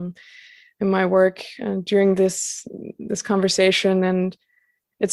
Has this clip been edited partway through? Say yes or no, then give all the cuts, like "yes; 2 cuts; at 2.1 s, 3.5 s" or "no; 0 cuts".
no; 0 cuts